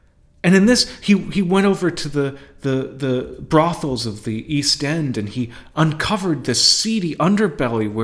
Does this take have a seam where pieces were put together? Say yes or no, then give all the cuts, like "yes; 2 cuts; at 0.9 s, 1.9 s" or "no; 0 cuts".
no; 0 cuts